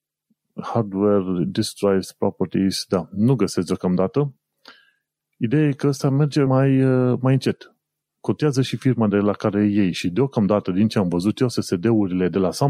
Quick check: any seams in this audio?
yes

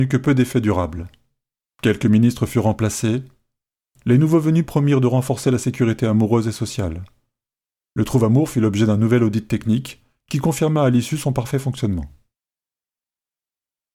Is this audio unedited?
yes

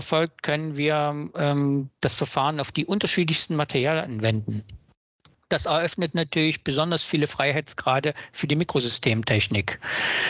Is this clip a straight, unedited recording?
yes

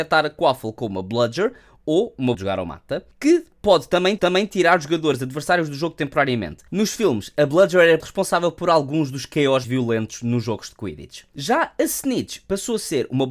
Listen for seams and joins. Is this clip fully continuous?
no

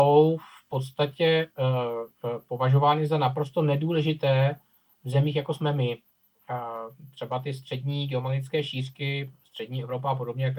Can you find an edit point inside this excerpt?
no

